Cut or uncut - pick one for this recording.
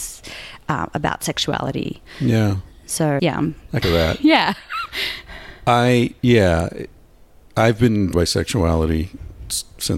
cut